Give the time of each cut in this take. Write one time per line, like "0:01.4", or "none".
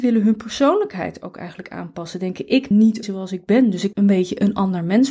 0:02.7
0:03.0
0:03.9